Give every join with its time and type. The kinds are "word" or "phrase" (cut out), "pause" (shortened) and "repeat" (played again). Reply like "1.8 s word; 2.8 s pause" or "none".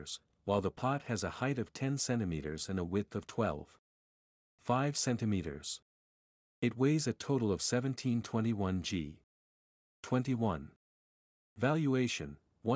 none